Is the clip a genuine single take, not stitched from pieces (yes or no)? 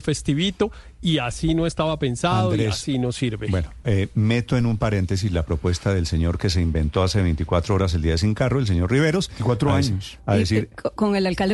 yes